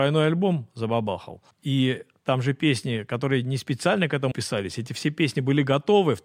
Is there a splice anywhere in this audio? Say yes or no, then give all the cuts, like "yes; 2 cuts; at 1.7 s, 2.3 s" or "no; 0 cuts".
yes; 2 cuts; at 1.5 s, 4.3 s